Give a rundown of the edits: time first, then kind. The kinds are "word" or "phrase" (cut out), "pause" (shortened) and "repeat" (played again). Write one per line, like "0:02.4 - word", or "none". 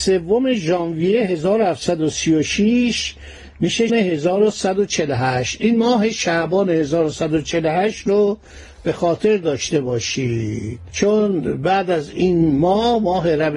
0:03.9 - word

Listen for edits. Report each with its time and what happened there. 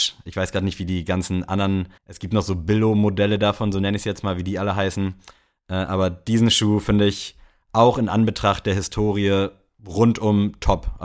0:02.0 - pause

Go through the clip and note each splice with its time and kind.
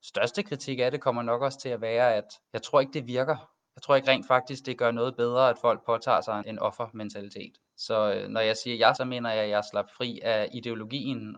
0:02.4 - pause
0:06.4 - word
0:07.7 - pause
0:09.0 - phrase

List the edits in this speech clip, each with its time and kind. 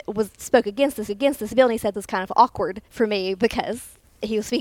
0:01.1 - repeat
0:01.9 - word
0:02.8 - pause

